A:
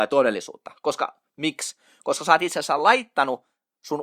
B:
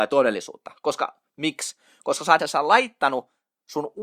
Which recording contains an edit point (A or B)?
B